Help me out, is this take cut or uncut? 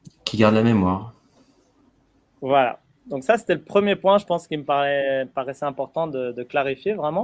uncut